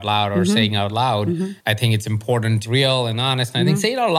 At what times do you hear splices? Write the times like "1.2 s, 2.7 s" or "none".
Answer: 1.6 s, 2.6 s